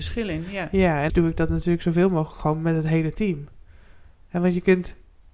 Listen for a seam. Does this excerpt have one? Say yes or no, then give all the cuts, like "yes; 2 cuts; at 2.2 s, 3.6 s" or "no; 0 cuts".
yes; 1 cut; at 1.1 s